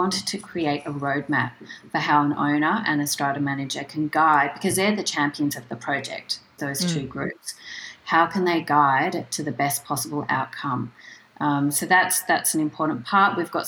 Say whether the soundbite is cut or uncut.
uncut